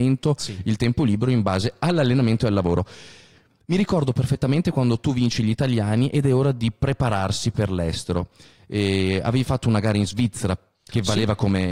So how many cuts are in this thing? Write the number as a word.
zero